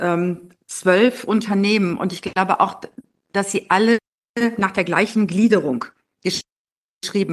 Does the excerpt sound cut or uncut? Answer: uncut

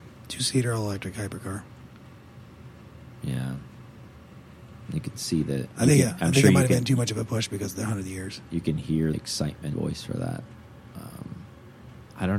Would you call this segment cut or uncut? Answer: cut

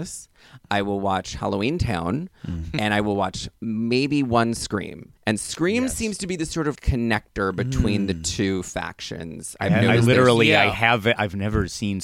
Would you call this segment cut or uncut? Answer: cut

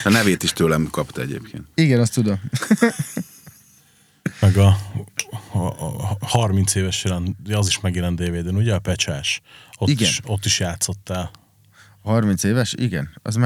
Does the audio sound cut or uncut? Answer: uncut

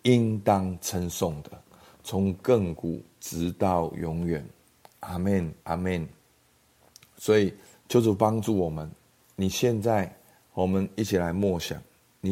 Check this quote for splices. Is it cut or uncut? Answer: cut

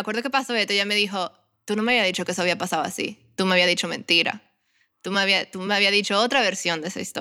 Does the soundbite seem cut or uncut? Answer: uncut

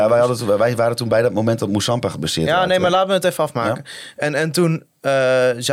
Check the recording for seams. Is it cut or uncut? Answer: uncut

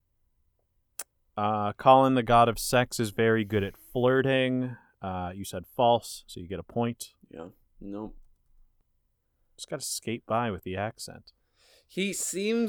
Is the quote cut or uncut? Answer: uncut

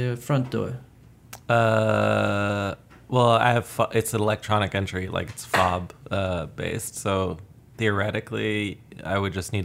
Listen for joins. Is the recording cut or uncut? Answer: uncut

